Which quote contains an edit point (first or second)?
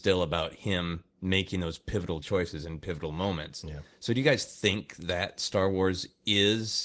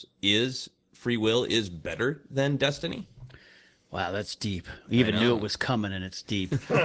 first